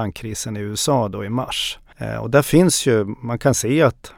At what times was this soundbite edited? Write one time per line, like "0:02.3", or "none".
none